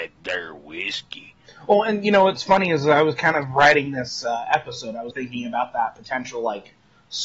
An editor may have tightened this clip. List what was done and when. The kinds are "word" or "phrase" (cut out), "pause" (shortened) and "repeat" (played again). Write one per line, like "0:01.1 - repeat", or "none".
0:05.1 - word